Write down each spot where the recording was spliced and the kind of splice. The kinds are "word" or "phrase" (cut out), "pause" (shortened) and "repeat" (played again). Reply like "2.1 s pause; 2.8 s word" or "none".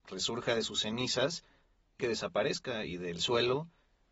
2.0 s phrase